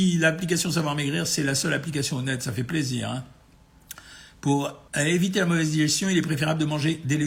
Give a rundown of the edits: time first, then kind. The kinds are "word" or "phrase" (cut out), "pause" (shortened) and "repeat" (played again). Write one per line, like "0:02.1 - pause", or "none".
0:04.9 - pause